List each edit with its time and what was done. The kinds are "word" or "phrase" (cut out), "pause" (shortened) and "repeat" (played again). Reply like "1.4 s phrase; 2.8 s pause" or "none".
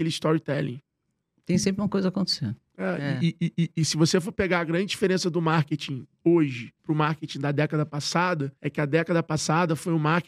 6.8 s pause; 8.6 s pause